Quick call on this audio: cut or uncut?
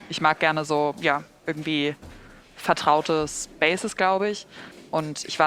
uncut